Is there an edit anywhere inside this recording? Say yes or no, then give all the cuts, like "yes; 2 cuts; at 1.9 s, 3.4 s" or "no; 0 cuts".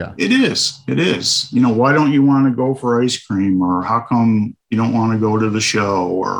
yes; 1 cut; at 4.6 s